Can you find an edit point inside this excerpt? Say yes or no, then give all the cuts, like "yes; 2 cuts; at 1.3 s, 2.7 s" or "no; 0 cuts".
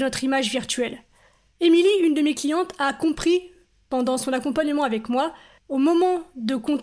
no; 0 cuts